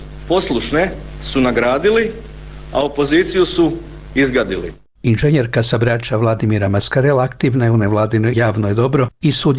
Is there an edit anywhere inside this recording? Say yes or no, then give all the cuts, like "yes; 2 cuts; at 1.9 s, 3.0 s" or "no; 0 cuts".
yes; 1 cut; at 8.3 s